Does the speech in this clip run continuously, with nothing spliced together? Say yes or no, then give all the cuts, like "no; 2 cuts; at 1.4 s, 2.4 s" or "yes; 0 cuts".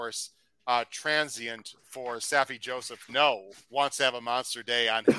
no; 2 cuts; at 3.1 s, 3.6 s